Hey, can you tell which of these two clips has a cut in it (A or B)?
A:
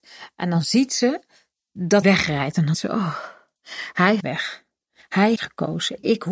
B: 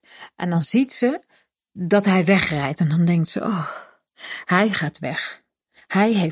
A